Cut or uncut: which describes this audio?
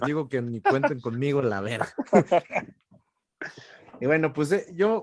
uncut